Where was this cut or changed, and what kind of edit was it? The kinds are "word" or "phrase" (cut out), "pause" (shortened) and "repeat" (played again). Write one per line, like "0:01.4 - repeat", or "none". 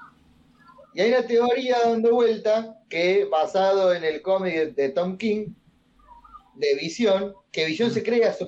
0:02.8 - pause